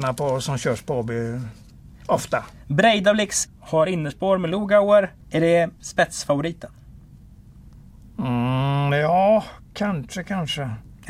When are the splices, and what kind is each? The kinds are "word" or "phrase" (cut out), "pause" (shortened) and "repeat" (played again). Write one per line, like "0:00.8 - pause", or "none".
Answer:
0:03.5 - word
0:05.2 - pause
0:05.8 - pause